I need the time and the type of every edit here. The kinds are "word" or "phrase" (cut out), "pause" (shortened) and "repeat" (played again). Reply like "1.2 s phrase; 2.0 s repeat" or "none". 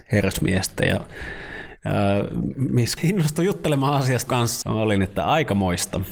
3.0 s word; 4.3 s word; 4.6 s word